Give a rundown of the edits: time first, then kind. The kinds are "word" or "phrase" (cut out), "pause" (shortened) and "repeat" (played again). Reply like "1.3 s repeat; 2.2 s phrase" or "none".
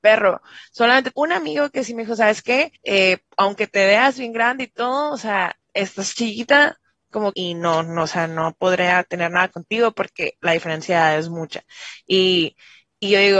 1.1 s word; 2.8 s pause; 5.6 s pause; 7.3 s word; 10.3 s word